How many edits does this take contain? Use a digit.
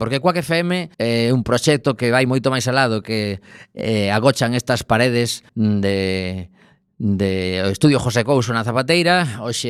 2